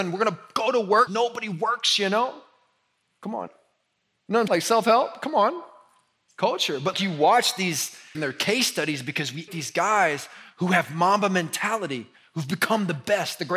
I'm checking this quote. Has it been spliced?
yes; 6 cuts; at 1.1 s, 3.5 s, 4.5 s, 6.9 s, 8.1 s, 9.5 s

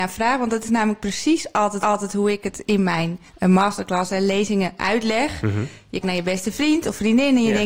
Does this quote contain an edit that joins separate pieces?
yes; 3 cuts; at 1.8 s, 3.3 s, 6.0 s

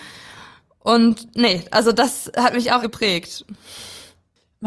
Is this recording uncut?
no; 1 cut; at 2.8 s

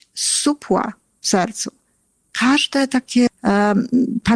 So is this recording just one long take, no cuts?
no; 1 cut; at 3.3 s

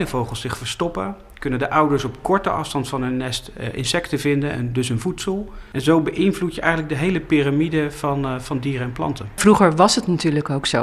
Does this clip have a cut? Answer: no; 0 cuts

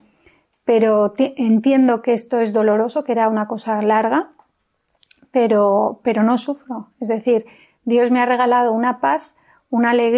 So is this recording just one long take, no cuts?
yes; 0 cuts

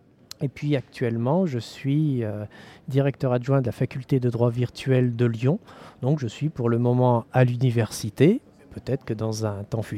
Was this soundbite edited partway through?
no; 0 cuts

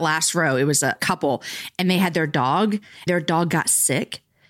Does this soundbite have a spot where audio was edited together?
yes; 2 cuts; at 1.0 s, 3.1 s

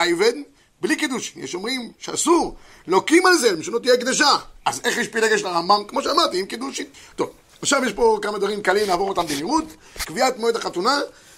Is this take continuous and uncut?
no; 2 cuts; at 2.0 s, 6.9 s

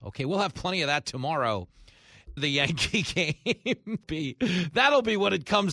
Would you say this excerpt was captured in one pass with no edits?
no; 2 cuts; at 2.4 s, 4.0 s

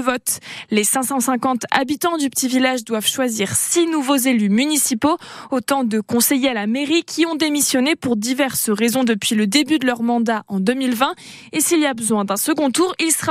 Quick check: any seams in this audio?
no; 0 cuts

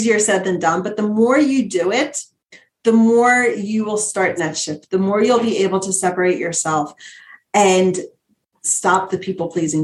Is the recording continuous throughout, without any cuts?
no; 1 cut; at 4.4 s

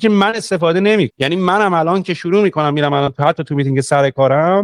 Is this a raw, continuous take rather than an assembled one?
no; 1 cut; at 1.1 s

